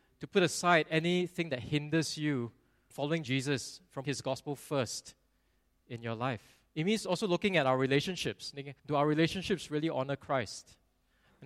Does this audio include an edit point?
yes; 4 cuts; at 2.9 s, 4.0 s, 6.7 s, 8.8 s

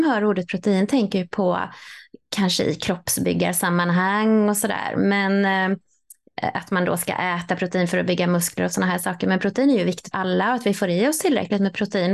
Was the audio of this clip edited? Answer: yes; 1 cut; at 10.1 s

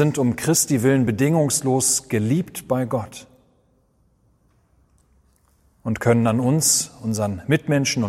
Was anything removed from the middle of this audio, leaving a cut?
no; 0 cuts

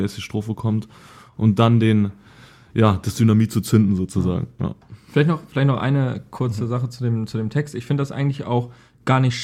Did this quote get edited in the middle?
no; 0 cuts

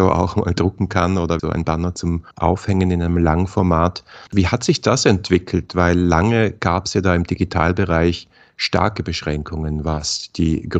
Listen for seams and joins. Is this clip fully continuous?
no; 3 cuts; at 1.4 s, 2.3 s, 4.3 s

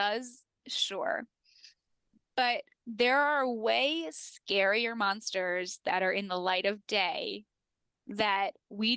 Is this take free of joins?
yes; 0 cuts

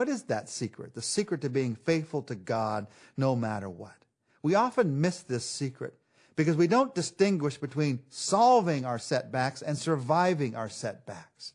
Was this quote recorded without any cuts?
yes; 0 cuts

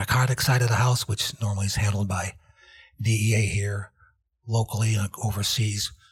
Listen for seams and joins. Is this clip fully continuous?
yes; 0 cuts

